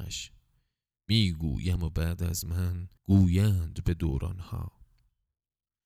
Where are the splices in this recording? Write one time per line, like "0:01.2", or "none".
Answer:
0:03.0

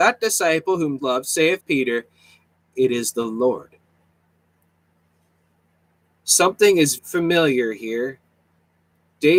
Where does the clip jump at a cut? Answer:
0:01.0
0:01.6
0:07.0

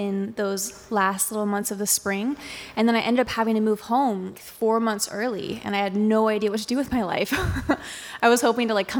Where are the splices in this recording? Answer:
0:04.3

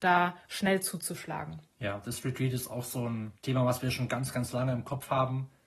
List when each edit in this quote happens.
0:03.4

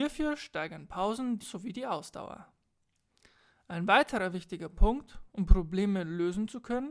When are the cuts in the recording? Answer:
0:01.4

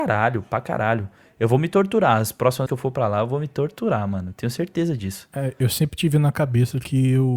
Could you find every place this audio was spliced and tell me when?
0:02.7

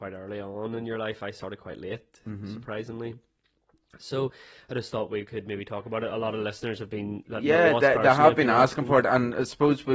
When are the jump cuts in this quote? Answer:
none

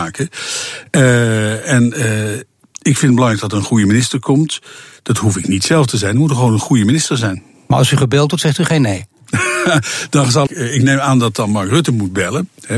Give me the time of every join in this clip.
0:10.5

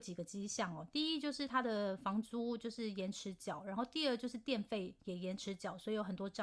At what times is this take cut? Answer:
none

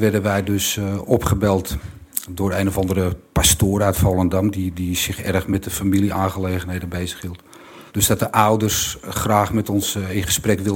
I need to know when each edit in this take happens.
0:07.9

